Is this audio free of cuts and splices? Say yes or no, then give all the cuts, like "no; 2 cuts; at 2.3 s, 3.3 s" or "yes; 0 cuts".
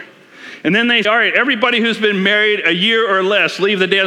no; 1 cut; at 1.0 s